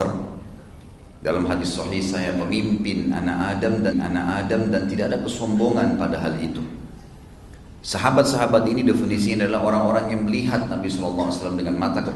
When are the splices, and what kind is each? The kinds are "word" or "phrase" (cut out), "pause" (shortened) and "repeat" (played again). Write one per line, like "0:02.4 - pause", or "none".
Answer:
0:03.9 - repeat